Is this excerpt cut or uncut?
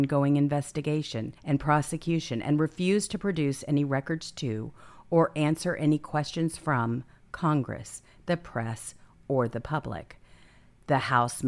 cut